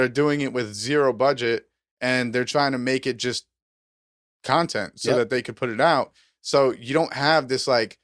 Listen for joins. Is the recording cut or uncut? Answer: uncut